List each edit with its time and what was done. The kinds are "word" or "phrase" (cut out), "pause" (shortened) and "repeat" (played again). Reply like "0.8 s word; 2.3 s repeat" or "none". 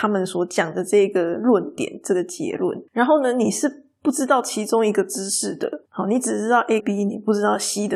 2.9 s pause; 5.9 s pause; 6.8 s word